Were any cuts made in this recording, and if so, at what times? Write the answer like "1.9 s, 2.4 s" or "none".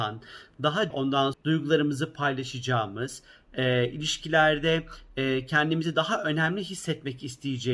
0.9 s, 1.3 s